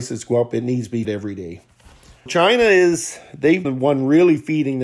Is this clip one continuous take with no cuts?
no; 3 cuts; at 1.0 s, 2.3 s, 3.6 s

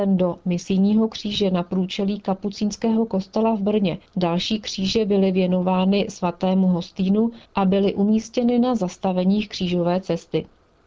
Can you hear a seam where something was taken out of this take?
yes; 2 cuts; at 4.1 s, 7.4 s

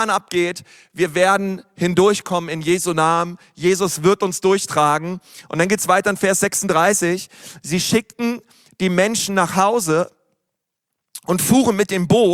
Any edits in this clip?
no; 0 cuts

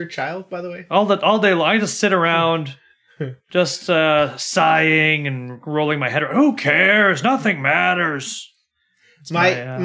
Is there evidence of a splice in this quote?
no; 0 cuts

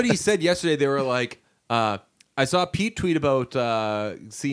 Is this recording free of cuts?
yes; 0 cuts

